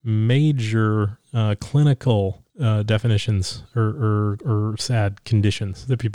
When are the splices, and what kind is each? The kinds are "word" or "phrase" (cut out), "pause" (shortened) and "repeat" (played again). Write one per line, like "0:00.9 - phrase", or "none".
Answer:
0:02.5 - pause